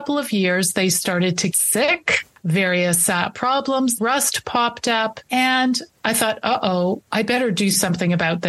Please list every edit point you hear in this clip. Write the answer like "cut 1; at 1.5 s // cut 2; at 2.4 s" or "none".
cut 1; at 1.5 s // cut 2; at 4.0 s